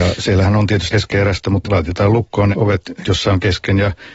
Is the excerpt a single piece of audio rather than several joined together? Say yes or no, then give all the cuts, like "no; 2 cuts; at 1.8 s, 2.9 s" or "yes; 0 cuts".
no; 4 cuts; at 0.9 s, 1.6 s, 2.5 s, 3.0 s